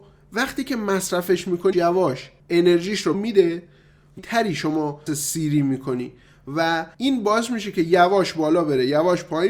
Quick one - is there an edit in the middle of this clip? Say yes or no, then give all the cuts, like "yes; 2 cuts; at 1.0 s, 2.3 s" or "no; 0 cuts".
yes; 6 cuts; at 1.7 s, 2.4 s, 3.1 s, 4.2 s, 5.1 s, 6.9 s